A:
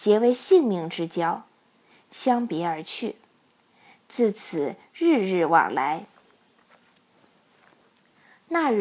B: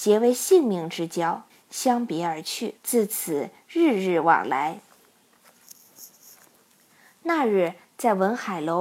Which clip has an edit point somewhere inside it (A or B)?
B